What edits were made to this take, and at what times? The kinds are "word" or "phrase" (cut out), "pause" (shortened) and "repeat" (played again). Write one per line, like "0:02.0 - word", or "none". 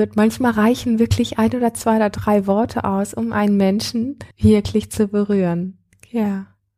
0:04.3 - pause